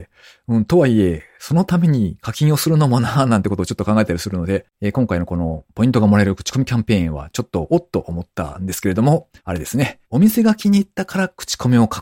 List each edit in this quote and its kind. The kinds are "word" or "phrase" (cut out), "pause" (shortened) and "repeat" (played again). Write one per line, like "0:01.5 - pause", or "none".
0:04.7 - pause
0:09.4 - pause
0:10.0 - pause